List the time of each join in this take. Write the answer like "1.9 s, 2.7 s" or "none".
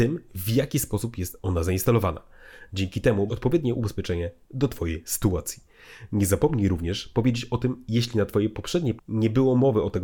3.3 s, 9.0 s